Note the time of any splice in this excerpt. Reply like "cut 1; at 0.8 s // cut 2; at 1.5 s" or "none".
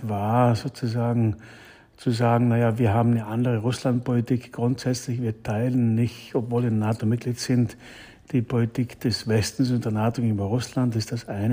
none